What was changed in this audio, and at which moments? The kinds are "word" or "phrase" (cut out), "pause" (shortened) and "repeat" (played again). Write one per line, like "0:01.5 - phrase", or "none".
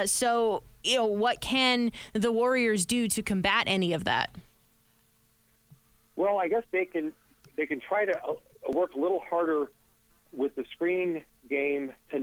0:06.6 - word